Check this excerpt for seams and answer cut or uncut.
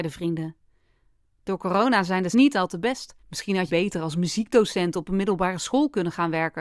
cut